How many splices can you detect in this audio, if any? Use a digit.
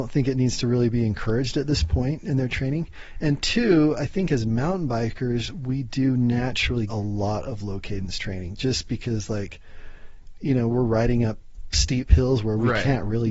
1